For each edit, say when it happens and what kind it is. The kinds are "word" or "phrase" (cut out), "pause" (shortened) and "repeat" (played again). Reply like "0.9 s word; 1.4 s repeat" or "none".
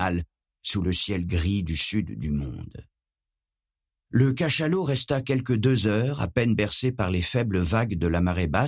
none